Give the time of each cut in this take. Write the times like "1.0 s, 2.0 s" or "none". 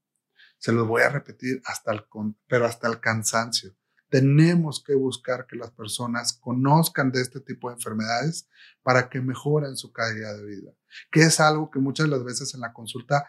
none